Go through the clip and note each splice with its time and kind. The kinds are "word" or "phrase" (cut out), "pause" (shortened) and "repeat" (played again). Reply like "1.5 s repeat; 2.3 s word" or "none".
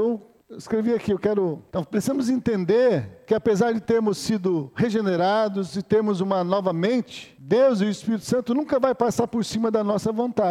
none